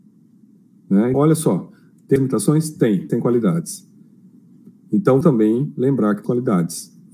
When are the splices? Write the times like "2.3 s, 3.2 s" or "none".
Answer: 1.1 s, 2.2 s, 3.1 s, 5.2 s, 6.2 s